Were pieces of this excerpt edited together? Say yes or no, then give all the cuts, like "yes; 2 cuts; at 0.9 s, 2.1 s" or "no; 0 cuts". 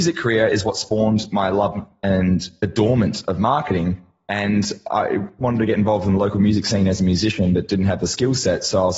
no; 0 cuts